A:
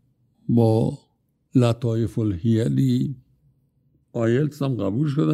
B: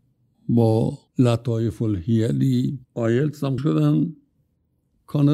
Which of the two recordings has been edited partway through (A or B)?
B